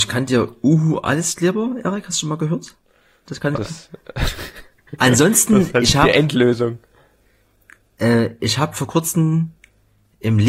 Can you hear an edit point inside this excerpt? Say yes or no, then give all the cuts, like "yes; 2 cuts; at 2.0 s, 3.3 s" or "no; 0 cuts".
yes; 1 cut; at 3.5 s